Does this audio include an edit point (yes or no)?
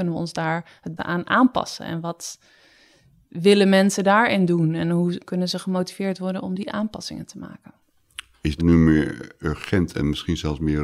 yes